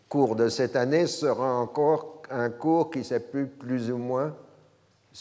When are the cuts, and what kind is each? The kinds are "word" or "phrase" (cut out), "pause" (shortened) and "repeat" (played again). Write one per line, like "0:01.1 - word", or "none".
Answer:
none

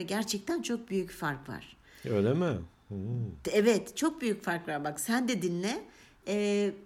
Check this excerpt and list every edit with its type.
none

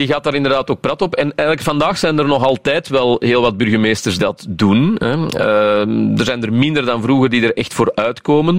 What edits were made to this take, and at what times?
0:04.2 - word

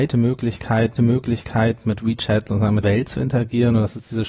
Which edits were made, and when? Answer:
0:01.0 - repeat
0:02.8 - phrase

